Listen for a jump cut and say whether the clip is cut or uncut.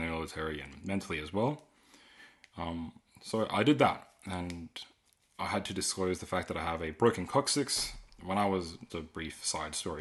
cut